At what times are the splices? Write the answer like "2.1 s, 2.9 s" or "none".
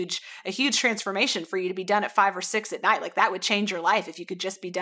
none